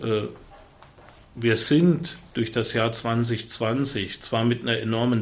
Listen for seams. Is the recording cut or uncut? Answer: uncut